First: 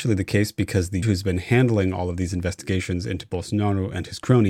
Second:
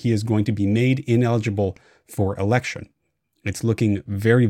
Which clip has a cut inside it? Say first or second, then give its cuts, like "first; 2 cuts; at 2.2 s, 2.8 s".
first; 1 cut; at 1.0 s